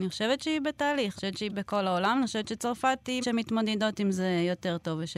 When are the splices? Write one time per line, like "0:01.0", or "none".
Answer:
0:01.2
0:01.5
0:03.2